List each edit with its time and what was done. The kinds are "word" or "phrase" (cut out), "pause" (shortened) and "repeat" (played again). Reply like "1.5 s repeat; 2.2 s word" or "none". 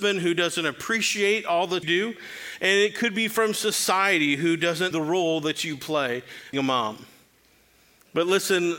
1.8 s word; 4.9 s word; 6.5 s word